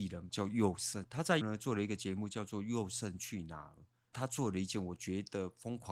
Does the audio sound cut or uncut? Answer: cut